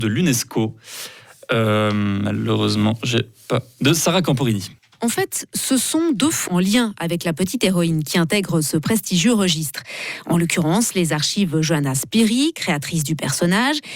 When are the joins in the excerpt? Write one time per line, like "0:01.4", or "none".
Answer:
0:04.8
0:06.5